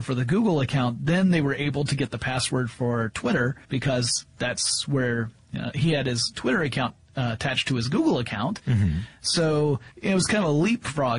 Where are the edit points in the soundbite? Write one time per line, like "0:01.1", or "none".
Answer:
0:03.6
0:09.9